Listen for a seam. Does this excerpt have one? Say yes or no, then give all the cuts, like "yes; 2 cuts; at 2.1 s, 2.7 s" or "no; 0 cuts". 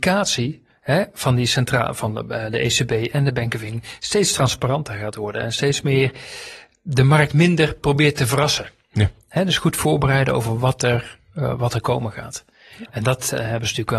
no; 0 cuts